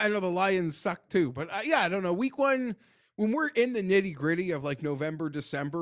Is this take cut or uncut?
uncut